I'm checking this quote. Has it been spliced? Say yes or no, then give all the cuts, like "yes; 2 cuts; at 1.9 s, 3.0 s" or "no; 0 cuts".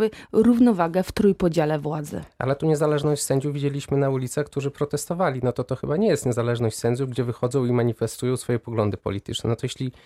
no; 0 cuts